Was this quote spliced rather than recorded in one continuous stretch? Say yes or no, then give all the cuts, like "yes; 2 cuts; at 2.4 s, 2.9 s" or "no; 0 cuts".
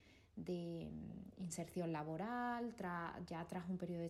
no; 0 cuts